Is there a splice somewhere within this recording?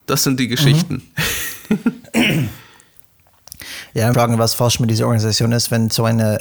yes; 1 cut; at 4.1 s

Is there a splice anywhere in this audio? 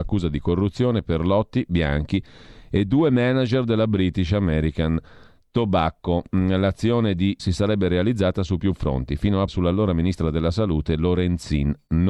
yes; 2 cuts; at 7.4 s, 9.5 s

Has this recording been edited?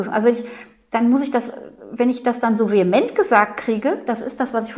no; 0 cuts

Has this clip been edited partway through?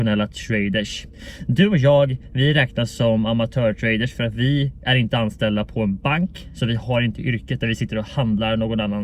no; 0 cuts

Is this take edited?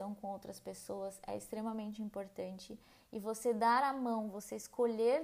no; 0 cuts

